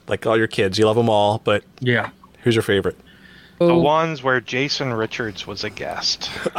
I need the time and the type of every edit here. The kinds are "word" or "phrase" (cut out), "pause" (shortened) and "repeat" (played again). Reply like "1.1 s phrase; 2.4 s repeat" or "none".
3.6 s word